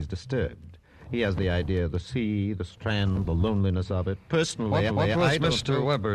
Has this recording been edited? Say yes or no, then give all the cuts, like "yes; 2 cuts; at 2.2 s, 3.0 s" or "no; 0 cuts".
yes; 1 cut; at 4.9 s